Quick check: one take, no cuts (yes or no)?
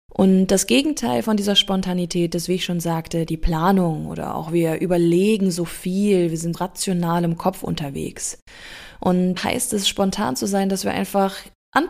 no